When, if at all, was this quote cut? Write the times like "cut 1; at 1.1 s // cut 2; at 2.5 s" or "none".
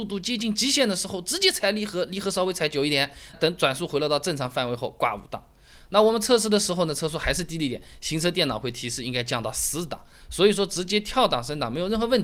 cut 1; at 3.3 s